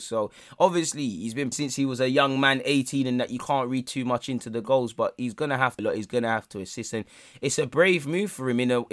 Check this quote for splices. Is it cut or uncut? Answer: cut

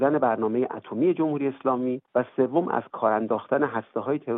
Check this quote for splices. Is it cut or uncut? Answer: cut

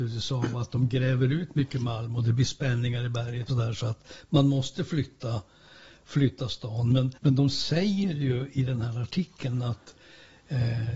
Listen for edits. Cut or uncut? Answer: cut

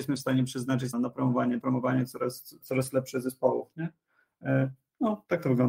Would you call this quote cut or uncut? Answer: cut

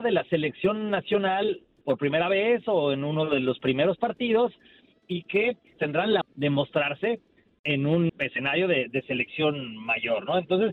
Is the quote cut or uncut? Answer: cut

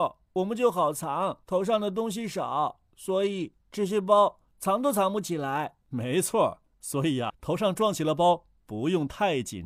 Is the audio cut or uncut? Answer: cut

